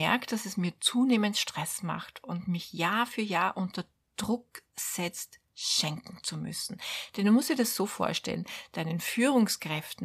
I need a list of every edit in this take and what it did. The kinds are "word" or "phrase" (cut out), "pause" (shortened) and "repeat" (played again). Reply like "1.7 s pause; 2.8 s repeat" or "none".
none